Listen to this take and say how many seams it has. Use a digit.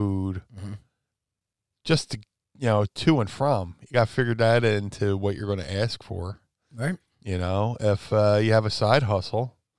0